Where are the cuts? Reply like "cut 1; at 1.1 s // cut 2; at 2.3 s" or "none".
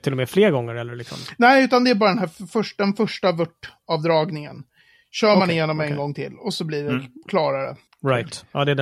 none